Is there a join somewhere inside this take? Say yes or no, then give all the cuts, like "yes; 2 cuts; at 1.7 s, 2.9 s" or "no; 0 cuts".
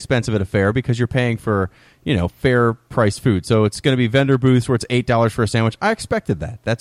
no; 0 cuts